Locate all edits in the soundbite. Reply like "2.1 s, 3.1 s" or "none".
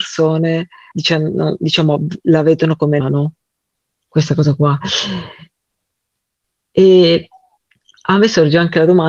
0.9 s, 3.0 s